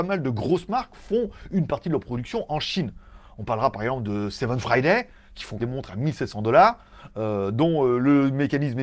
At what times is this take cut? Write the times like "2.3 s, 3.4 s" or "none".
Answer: 5.6 s